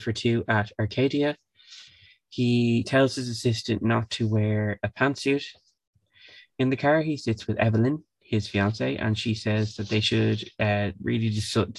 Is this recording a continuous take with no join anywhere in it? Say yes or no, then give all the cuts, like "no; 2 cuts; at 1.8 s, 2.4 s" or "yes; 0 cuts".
yes; 0 cuts